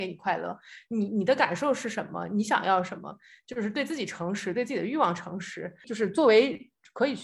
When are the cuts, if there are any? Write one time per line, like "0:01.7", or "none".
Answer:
none